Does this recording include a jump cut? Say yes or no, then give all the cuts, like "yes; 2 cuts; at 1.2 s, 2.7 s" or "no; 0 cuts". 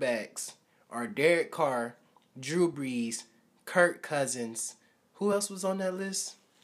no; 0 cuts